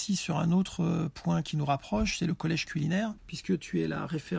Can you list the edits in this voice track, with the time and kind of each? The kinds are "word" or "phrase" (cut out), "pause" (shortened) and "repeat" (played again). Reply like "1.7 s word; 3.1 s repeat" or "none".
3.2 s pause